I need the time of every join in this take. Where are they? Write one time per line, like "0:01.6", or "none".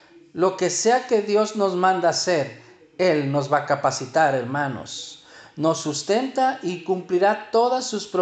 none